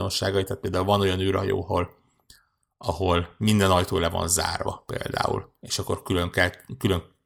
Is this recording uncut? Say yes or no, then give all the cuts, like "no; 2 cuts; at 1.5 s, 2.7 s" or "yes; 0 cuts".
yes; 0 cuts